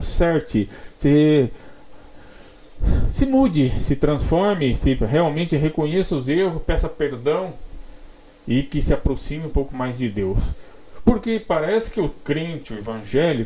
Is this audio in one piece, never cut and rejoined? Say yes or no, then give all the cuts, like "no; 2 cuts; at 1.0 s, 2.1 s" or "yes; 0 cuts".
yes; 0 cuts